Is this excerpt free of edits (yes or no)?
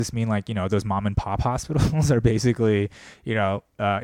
yes